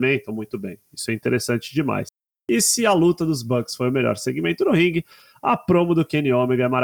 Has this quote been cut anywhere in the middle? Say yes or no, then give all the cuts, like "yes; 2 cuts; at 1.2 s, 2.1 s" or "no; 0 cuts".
no; 0 cuts